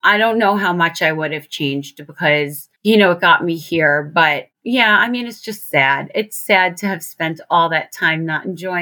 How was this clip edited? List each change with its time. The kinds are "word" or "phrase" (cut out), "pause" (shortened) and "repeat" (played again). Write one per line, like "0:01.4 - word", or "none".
0:02.8 - pause